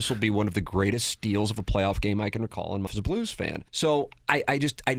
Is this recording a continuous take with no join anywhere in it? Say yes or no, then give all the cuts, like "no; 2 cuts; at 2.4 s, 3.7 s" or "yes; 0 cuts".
no; 2 cuts; at 2.9 s, 3.7 s